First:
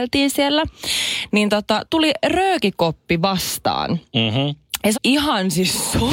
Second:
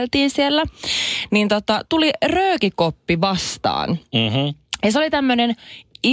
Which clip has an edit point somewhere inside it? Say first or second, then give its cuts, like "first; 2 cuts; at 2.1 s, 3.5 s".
first; 1 cut; at 4.9 s